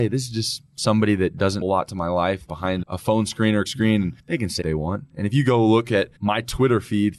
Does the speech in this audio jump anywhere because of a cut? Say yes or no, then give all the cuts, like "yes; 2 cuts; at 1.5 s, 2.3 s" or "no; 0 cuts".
yes; 7 cuts; at 1.6 s, 2.4 s, 2.8 s, 3.7 s, 4.2 s, 4.6 s, 6.2 s